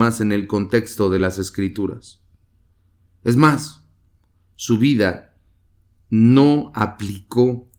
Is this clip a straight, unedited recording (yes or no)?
yes